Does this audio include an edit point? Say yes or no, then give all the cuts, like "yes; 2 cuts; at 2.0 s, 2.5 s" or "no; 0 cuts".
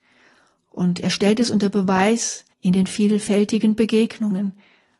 yes; 1 cut; at 2.5 s